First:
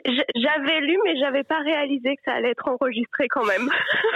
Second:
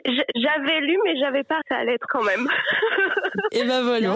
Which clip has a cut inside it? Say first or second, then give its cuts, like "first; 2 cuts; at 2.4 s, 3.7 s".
second; 2 cuts; at 1.6 s, 2.1 s